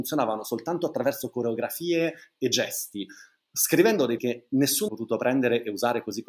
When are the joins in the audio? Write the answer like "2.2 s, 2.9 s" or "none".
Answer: 4.2 s, 4.9 s

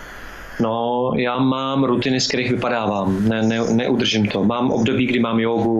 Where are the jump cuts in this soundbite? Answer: none

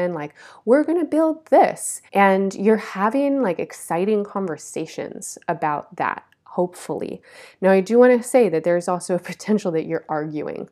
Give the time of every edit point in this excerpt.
2.1 s

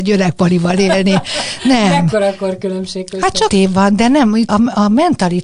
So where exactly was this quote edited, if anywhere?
3.5 s, 4.5 s

